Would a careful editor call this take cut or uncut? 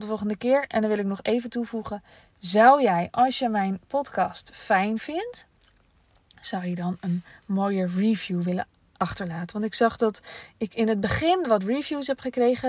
uncut